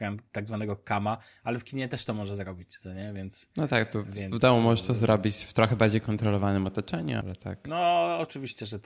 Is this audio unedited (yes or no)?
no